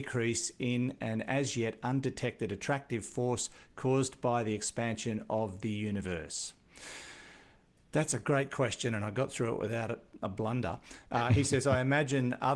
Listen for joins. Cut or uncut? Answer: uncut